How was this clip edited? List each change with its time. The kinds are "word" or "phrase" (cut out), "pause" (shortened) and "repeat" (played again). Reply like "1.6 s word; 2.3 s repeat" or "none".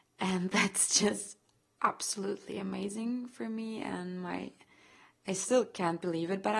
none

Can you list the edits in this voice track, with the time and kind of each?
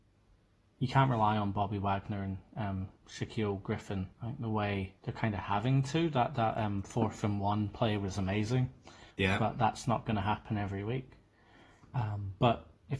3.0 s pause; 4.1 s pause; 5.0 s pause; 9.1 s pause

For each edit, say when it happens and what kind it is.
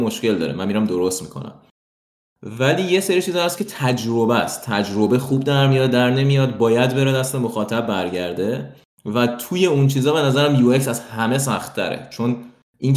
none

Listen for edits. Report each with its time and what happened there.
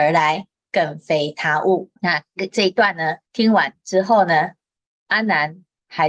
2.0 s pause; 3.2 s pause

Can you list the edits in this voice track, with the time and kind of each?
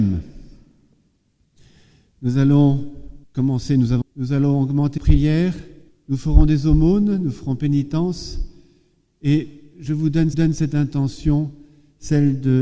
3.2 s pause; 4.0 s phrase; 5.0 s word; 5.9 s pause; 10.3 s repeat

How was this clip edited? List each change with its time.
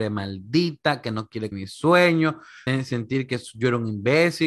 1.5 s word; 2.7 s word

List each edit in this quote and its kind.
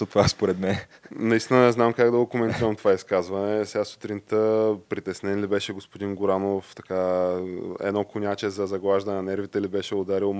none

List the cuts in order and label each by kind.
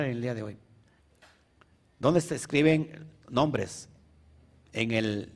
1.0 s pause; 3.2 s word

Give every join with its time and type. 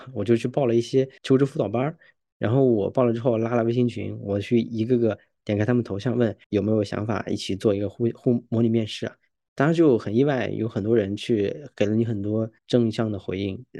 1.2 s pause; 6.4 s pause; 12.6 s pause

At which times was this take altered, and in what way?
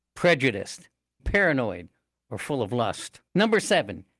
1.2 s word; 3.3 s pause

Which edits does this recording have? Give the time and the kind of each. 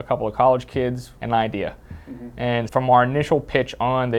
1.2 s word; 2.7 s word

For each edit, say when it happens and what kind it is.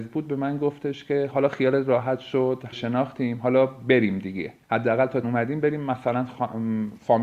1.3 s word; 2.7 s phrase; 4.6 s pause; 5.2 s word

